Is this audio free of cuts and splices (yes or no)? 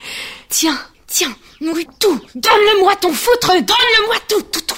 no